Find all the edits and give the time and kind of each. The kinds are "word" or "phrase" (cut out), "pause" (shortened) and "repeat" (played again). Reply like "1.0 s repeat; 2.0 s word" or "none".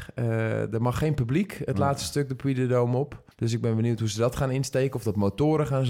3.3 s pause